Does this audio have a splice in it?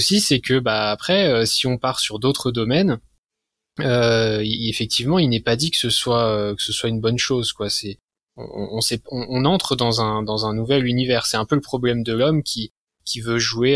no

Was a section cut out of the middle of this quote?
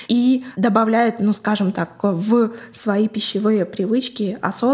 no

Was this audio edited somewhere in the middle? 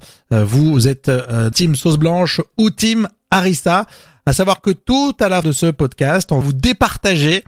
yes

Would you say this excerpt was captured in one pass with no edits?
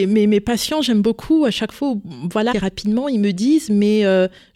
no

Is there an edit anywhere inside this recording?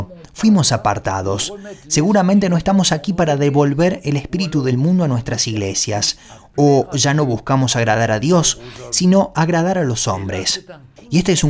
no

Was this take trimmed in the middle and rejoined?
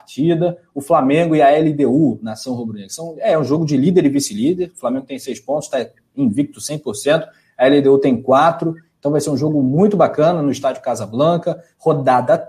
no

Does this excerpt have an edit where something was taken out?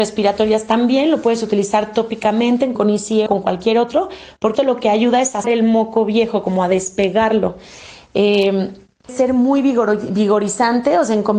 yes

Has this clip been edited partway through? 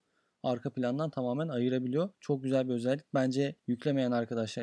yes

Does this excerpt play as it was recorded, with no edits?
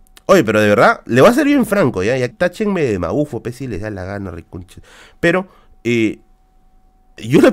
no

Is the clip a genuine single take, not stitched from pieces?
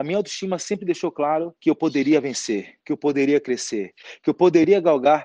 no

